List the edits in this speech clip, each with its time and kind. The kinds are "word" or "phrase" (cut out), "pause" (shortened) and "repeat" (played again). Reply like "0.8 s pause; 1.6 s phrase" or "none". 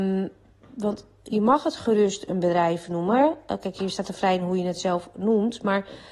4.2 s word